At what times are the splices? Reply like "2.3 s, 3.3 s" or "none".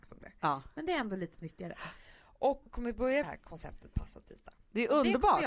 2.6 s, 3.2 s